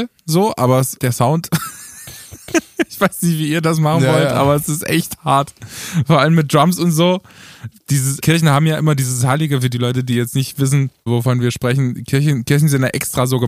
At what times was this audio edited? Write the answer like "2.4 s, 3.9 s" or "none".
1.0 s, 8.2 s, 11.1 s